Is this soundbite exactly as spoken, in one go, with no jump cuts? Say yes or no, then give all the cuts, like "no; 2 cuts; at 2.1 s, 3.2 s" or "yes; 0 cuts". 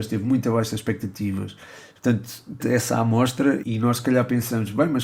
no; 2 cuts; at 2.6 s, 3.6 s